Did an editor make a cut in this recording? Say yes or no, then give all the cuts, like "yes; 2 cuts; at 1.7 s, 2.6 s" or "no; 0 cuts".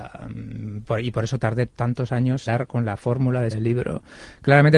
yes; 3 cuts; at 1.7 s, 2.5 s, 3.5 s